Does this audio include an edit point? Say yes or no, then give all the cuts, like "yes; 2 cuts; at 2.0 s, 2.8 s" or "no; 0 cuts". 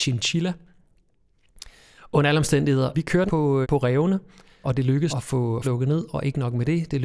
yes; 6 cuts; at 2.9 s, 3.3 s, 3.6 s, 4.6 s, 5.1 s, 5.6 s